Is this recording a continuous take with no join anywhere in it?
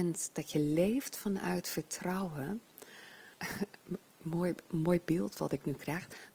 no; 1 cut; at 3.3 s

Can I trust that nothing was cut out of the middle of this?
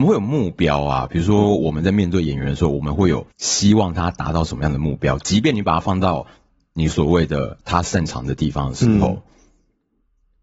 no; 1 cut; at 3.3 s

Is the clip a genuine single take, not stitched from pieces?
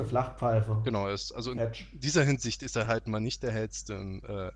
yes; 0 cuts

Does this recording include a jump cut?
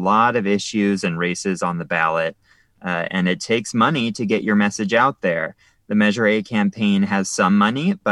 no; 0 cuts

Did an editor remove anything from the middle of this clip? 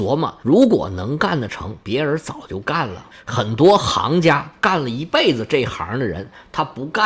no; 0 cuts

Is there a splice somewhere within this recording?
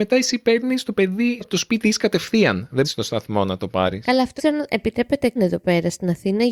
yes; 5 cuts; at 1.4 s, 1.8 s, 2.8 s, 4.4 s, 5.4 s

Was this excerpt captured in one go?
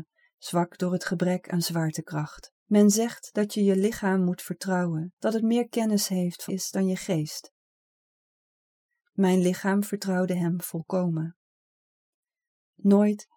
no; 3 cuts; at 2.6 s, 5.2 s, 6.5 s

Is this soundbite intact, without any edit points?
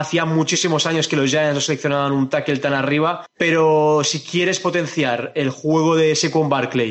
yes; 0 cuts

